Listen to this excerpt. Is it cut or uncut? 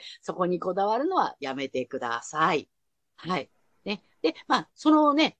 uncut